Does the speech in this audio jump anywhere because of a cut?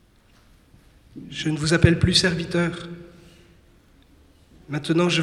no; 0 cuts

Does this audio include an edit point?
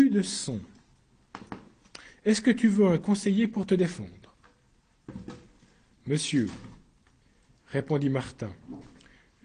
no; 0 cuts

